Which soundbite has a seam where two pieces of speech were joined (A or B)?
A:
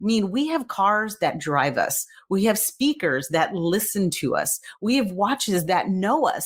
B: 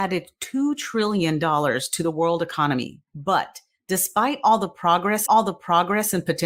B